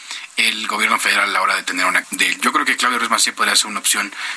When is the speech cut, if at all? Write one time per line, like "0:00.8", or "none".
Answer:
0:02.0